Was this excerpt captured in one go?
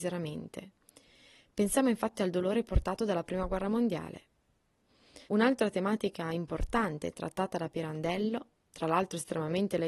no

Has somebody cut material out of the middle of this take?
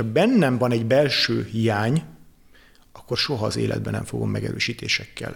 no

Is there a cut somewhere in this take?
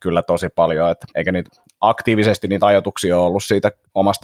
yes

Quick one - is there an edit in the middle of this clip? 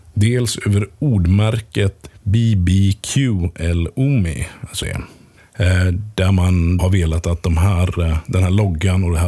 yes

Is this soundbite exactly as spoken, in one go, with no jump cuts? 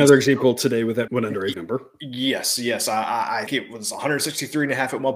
no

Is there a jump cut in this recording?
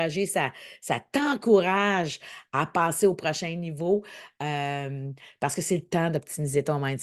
no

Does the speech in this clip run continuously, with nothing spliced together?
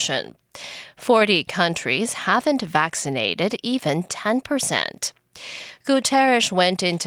yes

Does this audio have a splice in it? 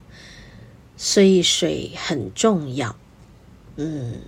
no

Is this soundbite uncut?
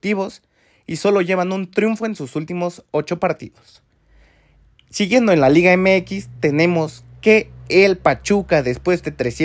yes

